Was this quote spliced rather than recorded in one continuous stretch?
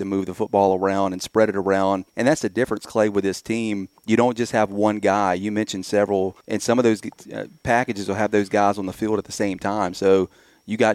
yes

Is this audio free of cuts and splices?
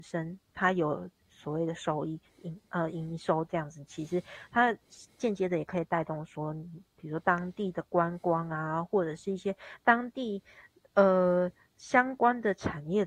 yes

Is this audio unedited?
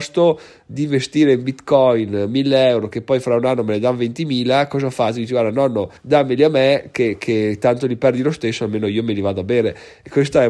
no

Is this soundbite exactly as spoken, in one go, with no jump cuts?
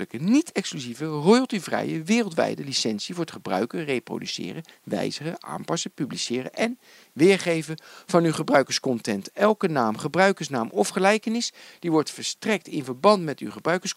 yes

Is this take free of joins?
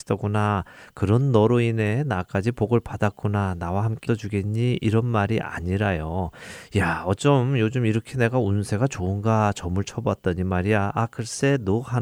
no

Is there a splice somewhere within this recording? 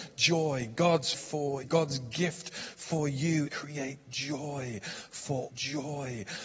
yes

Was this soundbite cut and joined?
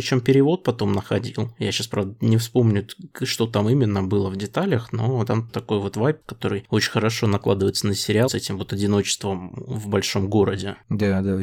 yes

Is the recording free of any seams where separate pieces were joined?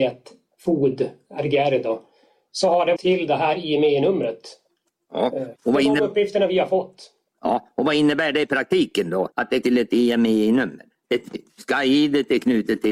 no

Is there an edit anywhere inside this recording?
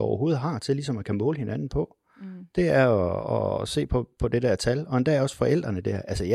no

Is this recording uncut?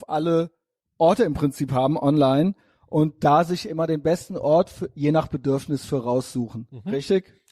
yes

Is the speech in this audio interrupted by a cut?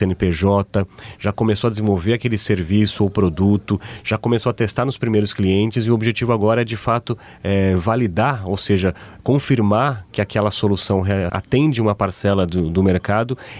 yes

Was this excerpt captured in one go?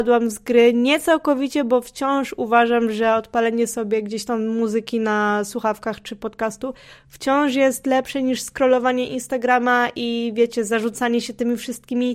yes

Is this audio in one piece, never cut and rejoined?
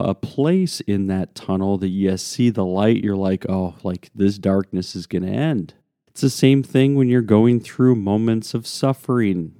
yes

